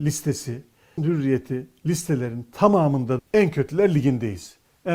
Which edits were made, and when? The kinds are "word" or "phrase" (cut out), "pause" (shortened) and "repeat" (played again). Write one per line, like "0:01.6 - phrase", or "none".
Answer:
0:01.0 - word
0:03.2 - word